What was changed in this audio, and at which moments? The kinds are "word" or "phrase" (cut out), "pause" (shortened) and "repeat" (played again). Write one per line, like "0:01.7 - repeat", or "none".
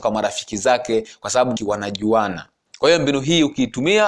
0:01.6 - word